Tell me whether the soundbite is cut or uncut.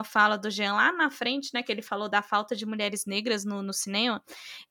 uncut